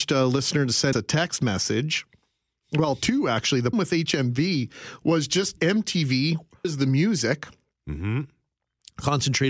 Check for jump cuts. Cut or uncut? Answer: cut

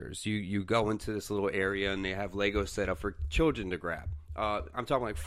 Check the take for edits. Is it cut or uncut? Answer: uncut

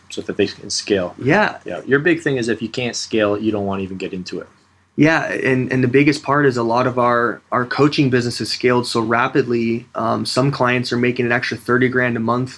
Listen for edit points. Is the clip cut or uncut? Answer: uncut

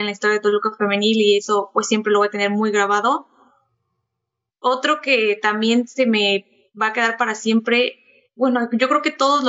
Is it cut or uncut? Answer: uncut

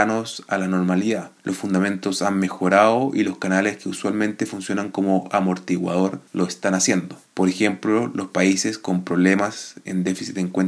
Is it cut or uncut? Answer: uncut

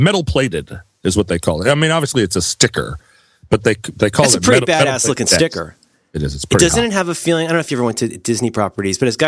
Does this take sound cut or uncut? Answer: uncut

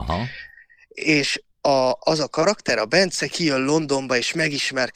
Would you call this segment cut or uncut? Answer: cut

